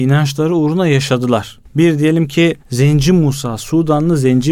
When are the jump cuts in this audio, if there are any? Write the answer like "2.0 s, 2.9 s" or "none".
1.7 s, 2.6 s